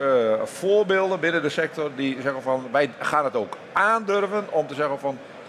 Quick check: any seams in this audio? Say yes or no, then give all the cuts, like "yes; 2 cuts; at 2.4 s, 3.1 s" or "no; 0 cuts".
no; 0 cuts